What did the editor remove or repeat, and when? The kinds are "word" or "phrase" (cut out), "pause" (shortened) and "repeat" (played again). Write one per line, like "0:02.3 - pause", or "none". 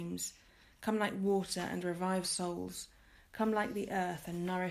0:02.2 - word